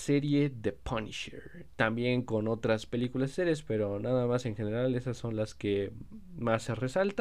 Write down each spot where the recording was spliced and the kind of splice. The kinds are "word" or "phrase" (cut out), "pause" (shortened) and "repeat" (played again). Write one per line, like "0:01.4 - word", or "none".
none